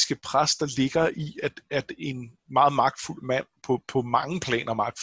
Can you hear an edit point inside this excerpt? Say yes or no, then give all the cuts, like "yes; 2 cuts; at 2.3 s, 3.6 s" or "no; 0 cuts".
yes; 1 cut; at 2.4 s